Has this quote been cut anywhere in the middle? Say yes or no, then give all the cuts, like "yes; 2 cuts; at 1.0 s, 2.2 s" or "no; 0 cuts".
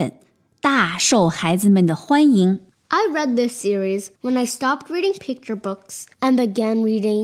yes; 2 cuts; at 4.1 s, 6.1 s